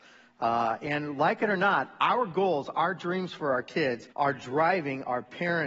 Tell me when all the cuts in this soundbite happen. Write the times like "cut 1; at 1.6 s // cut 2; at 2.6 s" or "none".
cut 1; at 4.1 s

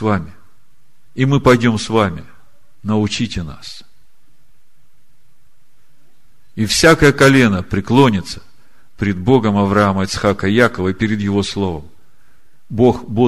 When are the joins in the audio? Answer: none

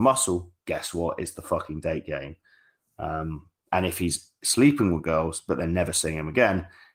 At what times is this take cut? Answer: none

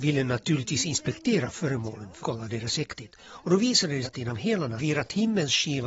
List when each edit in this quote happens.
cut 1; at 2.2 s // cut 2; at 4.0 s // cut 3; at 4.8 s

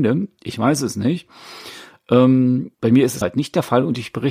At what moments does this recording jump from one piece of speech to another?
cut 1; at 2.7 s // cut 2; at 3.2 s

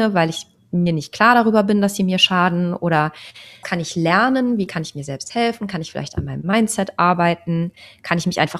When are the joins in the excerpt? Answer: cut 1; at 3.6 s

